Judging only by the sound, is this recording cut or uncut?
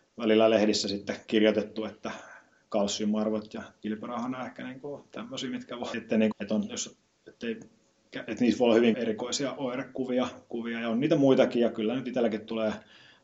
cut